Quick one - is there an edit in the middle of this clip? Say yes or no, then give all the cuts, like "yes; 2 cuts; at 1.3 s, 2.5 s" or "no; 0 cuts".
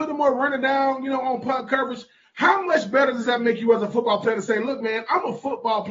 no; 0 cuts